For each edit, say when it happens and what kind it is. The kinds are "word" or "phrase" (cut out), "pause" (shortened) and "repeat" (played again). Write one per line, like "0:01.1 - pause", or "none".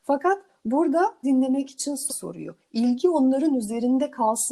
0:01.2 - word
0:02.1 - word